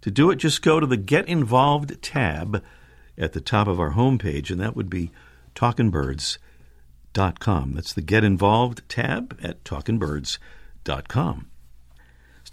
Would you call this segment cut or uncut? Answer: uncut